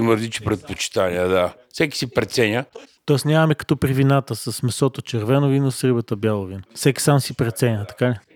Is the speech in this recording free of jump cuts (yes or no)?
no